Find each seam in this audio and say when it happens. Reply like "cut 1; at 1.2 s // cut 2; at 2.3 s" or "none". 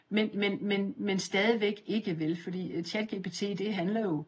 none